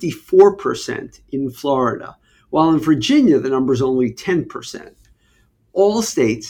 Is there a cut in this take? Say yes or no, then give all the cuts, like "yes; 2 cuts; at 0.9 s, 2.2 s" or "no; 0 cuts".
no; 0 cuts